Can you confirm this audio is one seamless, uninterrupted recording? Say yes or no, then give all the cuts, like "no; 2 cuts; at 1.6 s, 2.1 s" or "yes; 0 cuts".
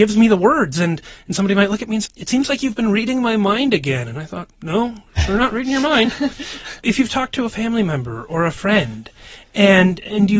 no; 3 cuts; at 2.1 s, 4.5 s, 6.8 s